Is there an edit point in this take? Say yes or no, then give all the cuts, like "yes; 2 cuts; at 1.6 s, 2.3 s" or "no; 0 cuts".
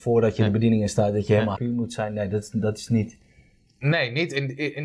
yes; 1 cut; at 1.6 s